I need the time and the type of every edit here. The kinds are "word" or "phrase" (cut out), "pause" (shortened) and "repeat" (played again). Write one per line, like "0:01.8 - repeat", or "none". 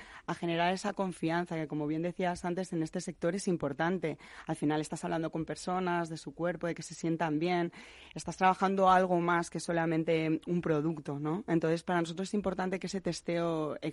none